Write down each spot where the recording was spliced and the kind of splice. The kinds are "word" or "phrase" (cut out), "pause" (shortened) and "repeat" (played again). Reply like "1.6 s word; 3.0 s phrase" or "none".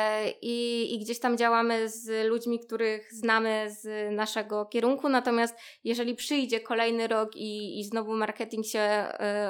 none